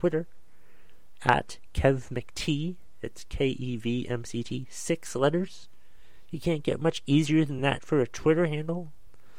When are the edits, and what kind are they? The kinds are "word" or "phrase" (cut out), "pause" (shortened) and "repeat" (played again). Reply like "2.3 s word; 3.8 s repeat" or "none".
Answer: none